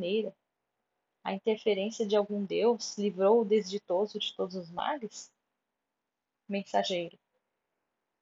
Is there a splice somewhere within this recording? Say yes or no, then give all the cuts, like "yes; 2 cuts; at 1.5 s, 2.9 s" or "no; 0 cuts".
no; 0 cuts